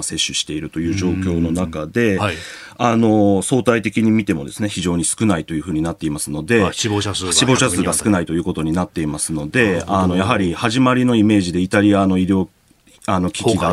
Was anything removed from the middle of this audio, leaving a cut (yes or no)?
no